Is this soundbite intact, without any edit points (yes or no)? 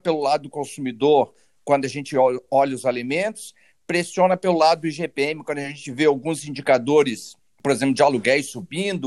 yes